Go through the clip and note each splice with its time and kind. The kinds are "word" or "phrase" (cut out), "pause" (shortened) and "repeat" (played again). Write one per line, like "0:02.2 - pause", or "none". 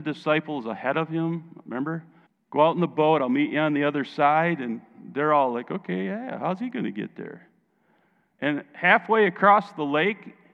0:02.3 - pause